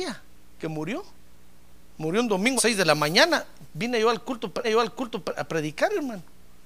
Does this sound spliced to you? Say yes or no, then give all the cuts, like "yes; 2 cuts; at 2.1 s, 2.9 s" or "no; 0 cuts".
yes; 3 cuts; at 1.7 s, 2.6 s, 4.6 s